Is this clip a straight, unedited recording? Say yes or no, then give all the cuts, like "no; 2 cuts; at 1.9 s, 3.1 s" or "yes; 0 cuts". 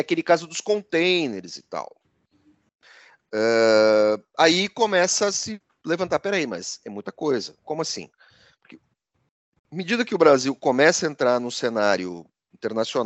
yes; 0 cuts